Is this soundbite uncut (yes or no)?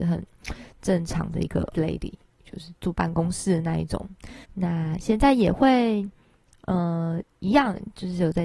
no